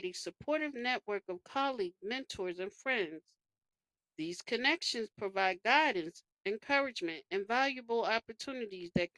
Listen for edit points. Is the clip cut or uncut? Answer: uncut